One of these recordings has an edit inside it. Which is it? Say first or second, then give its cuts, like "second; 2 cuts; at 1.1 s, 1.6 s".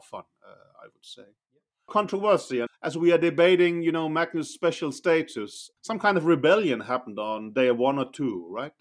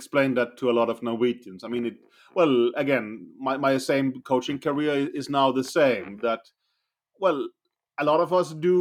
first; 3 cuts; at 1.9 s, 2.7 s, 5.8 s